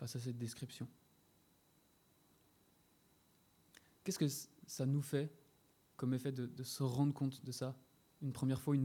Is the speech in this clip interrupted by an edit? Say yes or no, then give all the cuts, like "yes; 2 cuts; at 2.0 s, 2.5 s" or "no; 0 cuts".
no; 0 cuts